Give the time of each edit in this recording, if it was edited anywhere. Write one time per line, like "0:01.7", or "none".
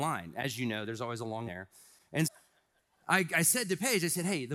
0:01.5
0:02.2

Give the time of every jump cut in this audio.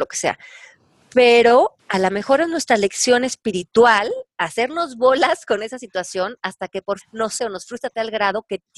0:01.8
0:07.0
0:07.4

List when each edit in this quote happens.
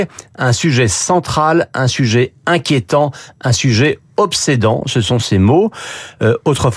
none

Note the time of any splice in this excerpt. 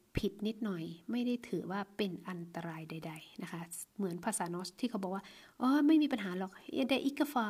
0:03.9

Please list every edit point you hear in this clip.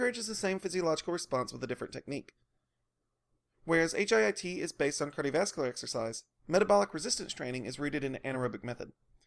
none

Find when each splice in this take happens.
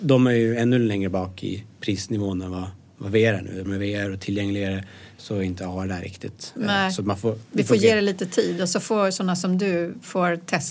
0:03.6

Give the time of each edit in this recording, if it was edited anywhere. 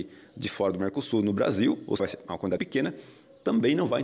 0:02.0
0:02.6

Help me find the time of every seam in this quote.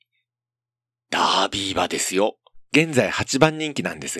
0:02.7

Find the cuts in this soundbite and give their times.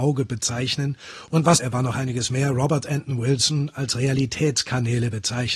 0:01.6

